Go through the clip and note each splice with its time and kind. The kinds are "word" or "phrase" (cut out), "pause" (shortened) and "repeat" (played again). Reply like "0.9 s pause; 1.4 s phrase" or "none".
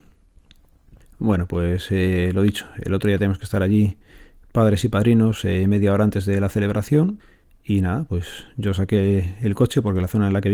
none